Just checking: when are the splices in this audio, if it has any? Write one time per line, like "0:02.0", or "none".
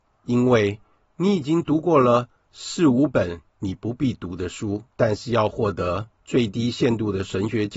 0:04.9
0:06.2